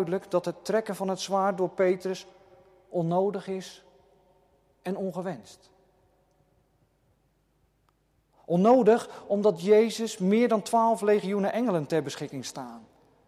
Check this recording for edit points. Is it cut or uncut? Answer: uncut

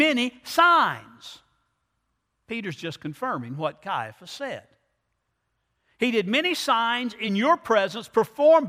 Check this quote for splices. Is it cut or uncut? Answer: uncut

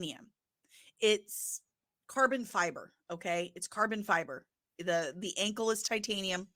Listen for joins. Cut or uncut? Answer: uncut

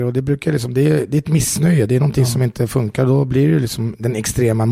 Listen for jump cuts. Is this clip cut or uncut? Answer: uncut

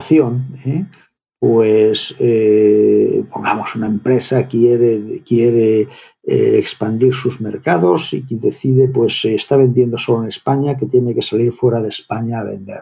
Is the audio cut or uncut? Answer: uncut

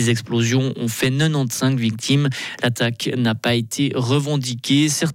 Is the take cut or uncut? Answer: uncut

